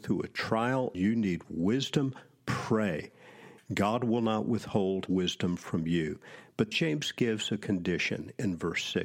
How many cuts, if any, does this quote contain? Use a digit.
3